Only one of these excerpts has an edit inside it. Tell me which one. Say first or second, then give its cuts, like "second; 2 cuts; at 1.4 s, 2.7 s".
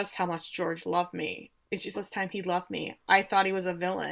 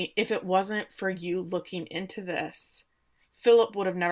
first; 1 cut; at 1.9 s